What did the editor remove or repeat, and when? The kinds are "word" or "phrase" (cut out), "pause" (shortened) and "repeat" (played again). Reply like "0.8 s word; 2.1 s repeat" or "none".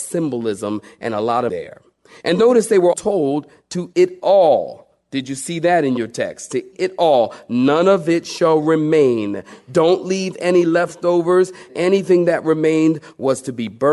1.5 s word; 2.4 s word; 2.9 s word; 3.9 s word; 6.7 s word; 11.7 s word